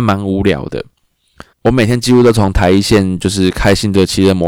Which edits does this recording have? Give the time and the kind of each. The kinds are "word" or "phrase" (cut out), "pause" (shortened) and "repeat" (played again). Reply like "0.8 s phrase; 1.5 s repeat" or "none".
1.5 s pause